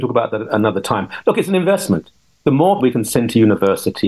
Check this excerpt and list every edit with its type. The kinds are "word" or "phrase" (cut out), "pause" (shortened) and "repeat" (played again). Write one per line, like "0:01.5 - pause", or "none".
0:02.8 - word